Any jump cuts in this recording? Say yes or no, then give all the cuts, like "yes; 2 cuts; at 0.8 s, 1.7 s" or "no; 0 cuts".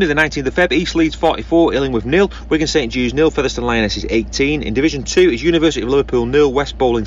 no; 0 cuts